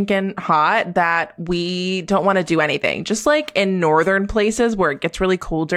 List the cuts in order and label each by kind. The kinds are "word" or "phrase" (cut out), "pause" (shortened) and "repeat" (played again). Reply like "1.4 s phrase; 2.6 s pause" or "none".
none